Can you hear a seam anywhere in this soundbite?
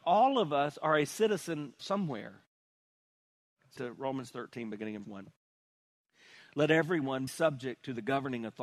yes; 4 cuts; at 1.8 s, 3.8 s, 5.0 s, 7.3 s

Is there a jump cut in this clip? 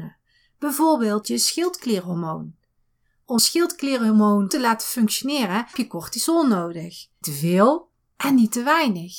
yes; 5 cuts; at 1.2 s, 3.4 s, 4.5 s, 5.7 s, 7.2 s

